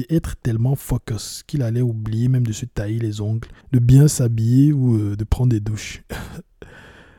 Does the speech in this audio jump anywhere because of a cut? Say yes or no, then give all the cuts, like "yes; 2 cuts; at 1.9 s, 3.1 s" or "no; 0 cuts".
yes; 1 cut; at 3.6 s